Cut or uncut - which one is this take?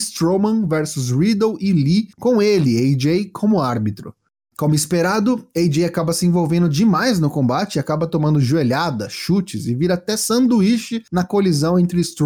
uncut